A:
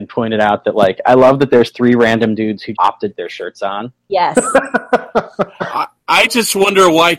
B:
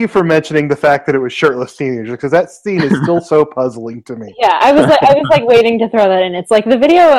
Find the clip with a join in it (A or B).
A